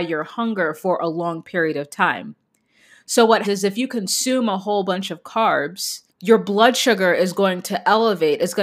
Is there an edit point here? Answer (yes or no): yes